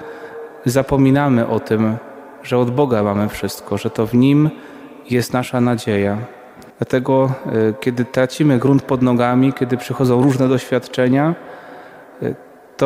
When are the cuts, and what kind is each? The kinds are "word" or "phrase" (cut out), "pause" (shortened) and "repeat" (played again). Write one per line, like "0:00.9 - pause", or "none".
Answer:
0:06.7 - pause